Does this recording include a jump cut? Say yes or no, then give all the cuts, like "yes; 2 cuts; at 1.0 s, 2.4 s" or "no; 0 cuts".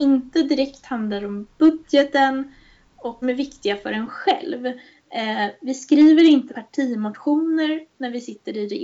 yes; 2 cuts; at 3.2 s, 6.5 s